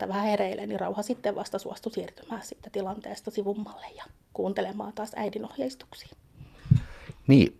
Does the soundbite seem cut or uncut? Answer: uncut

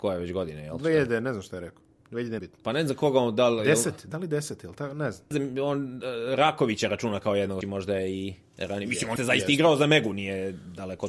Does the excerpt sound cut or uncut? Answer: cut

